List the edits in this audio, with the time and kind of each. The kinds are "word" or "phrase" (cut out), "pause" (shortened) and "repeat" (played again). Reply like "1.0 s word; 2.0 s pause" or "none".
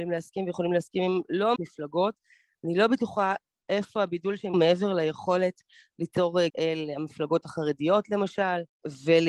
1.6 s word; 4.5 s phrase; 6.5 s word